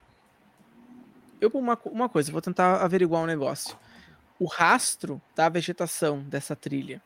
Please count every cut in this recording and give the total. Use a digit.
2